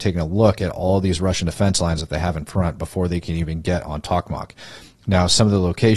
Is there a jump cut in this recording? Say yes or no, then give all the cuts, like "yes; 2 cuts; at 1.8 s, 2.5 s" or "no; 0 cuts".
no; 0 cuts